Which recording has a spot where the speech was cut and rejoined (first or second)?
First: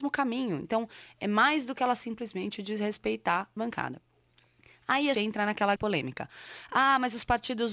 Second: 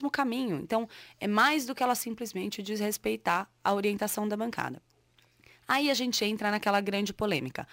first